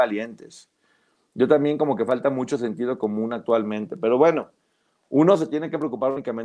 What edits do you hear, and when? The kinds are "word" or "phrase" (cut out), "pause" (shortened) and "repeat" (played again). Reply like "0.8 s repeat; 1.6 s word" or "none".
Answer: none